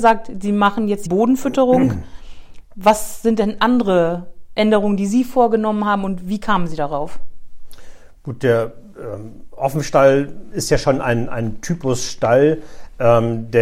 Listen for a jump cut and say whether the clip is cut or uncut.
cut